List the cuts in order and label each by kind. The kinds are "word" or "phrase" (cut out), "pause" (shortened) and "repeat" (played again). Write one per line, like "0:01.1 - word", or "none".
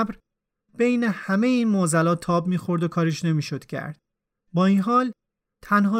none